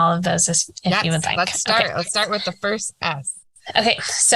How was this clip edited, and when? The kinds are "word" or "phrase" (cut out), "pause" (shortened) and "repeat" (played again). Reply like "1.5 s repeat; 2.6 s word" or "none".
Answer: none